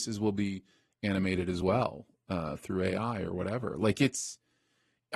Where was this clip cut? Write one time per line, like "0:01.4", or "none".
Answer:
none